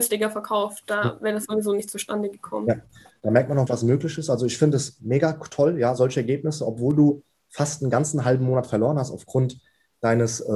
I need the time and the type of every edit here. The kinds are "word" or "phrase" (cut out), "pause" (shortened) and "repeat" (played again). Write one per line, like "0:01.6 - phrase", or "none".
0:03.7 - word